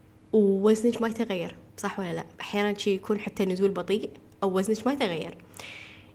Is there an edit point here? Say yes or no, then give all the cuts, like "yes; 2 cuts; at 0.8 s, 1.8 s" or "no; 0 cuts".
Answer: yes; 2 cuts; at 1.7 s, 2.3 s